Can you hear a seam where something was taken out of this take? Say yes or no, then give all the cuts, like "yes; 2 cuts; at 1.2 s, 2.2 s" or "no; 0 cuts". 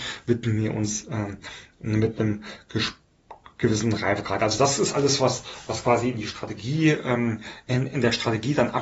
no; 0 cuts